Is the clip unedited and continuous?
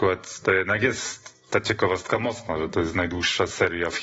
yes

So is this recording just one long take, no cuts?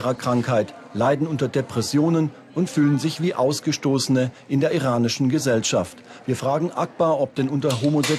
yes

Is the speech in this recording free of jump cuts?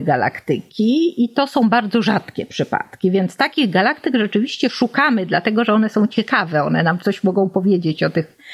yes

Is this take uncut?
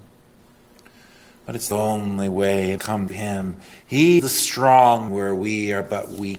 no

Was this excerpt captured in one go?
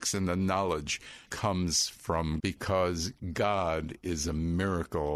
no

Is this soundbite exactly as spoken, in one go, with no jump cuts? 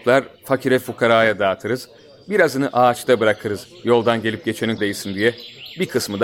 no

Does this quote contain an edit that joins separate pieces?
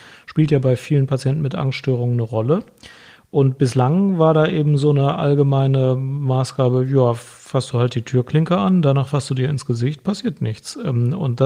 no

